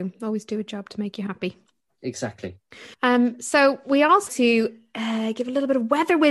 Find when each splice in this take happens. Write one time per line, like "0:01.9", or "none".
0:02.9
0:04.3